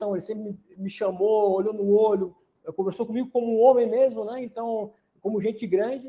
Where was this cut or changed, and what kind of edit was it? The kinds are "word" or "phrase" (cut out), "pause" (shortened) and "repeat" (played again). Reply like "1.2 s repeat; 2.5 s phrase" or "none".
none